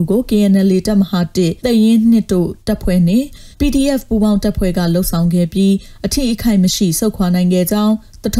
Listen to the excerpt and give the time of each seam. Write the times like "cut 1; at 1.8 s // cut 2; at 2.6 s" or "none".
cut 1; at 1.6 s // cut 2; at 3.5 s

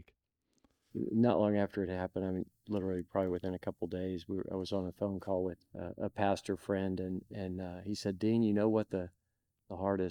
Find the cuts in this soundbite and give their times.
cut 1; at 5.7 s

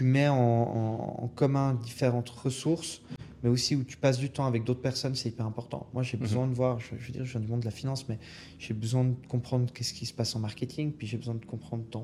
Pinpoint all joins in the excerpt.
none

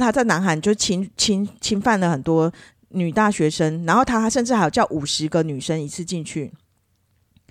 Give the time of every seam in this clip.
none

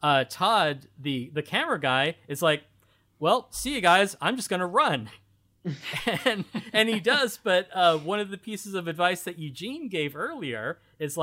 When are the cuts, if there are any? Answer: none

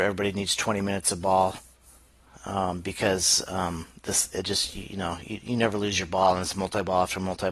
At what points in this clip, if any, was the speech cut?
none

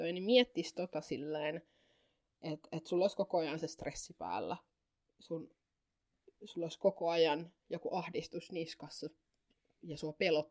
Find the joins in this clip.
none

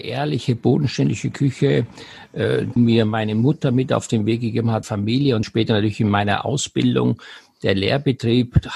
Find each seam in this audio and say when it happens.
cut 1; at 2.8 s // cut 2; at 4.8 s // cut 3; at 5.4 s

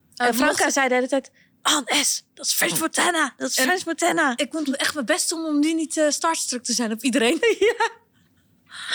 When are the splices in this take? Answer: cut 1; at 1.5 s

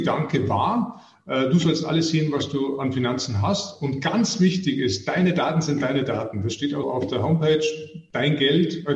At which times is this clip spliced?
cut 1; at 6.8 s

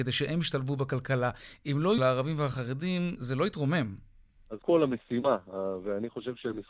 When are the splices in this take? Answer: cut 1; at 2.0 s // cut 2; at 3.2 s // cut 3; at 4.6 s

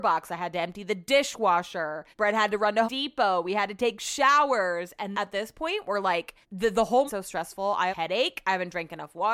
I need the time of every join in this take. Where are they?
cut 1; at 2.1 s // cut 2; at 2.8 s // cut 3; at 5.1 s // cut 4; at 6.4 s // cut 5; at 7.1 s // cut 6; at 7.9 s

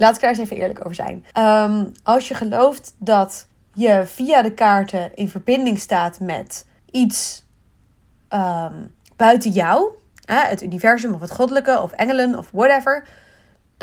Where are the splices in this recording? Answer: cut 1; at 1.3 s // cut 2; at 3.5 s // cut 3; at 6.8 s // cut 4; at 9.0 s // cut 5; at 10.1 s

